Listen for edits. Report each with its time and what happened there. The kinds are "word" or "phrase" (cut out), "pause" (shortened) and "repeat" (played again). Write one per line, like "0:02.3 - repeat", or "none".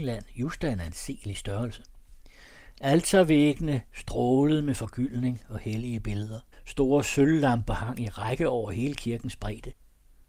0:06.5 - pause